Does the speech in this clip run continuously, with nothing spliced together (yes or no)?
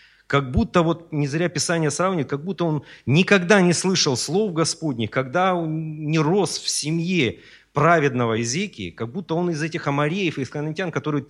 yes